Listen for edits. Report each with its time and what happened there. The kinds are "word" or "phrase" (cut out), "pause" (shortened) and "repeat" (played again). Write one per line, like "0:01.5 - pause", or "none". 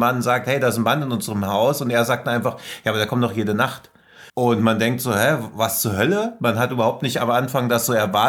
0:04.3 - pause